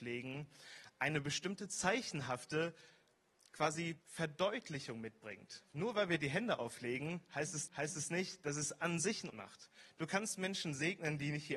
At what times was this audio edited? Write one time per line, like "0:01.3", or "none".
0:04.0
0:07.7
0:09.3